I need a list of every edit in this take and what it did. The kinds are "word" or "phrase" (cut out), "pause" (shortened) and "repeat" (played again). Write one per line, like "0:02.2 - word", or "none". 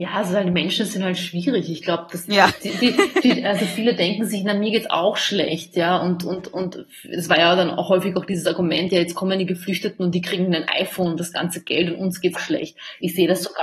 0:12.3 - word